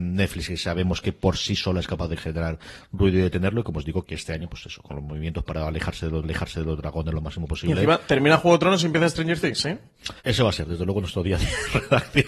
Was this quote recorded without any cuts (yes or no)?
no